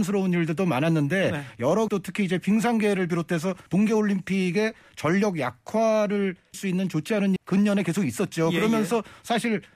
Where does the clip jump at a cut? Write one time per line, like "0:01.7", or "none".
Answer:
0:01.9
0:03.7
0:06.5
0:07.4